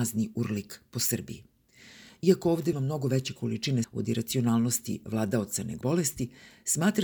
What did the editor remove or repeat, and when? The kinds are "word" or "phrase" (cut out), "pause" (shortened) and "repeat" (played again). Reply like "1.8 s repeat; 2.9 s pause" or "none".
2.7 s phrase; 3.8 s word; 5.8 s word